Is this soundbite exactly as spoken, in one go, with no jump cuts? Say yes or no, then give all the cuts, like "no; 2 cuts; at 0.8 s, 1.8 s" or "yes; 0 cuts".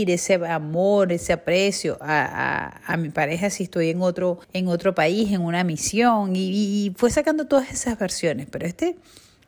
no; 1 cut; at 4.4 s